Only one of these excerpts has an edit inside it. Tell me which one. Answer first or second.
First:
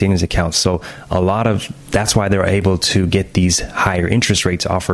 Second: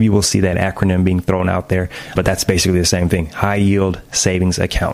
second